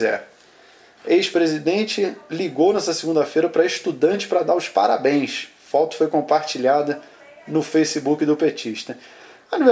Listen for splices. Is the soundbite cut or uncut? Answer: uncut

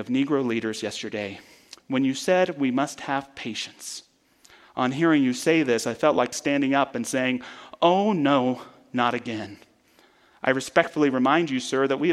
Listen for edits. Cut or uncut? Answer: uncut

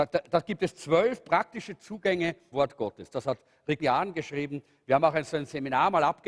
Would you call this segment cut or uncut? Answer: cut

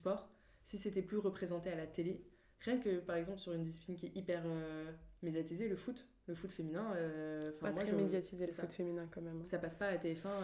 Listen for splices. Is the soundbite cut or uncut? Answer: uncut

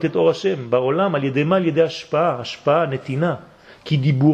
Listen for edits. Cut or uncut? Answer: uncut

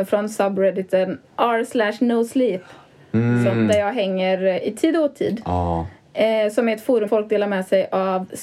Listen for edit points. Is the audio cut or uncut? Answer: cut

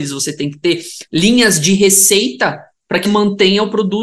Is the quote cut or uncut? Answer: cut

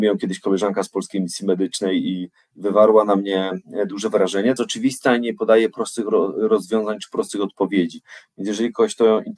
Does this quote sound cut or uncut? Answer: cut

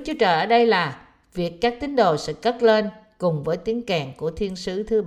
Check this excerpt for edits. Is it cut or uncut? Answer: uncut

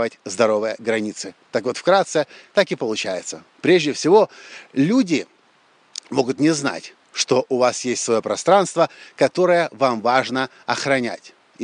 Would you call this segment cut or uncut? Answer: uncut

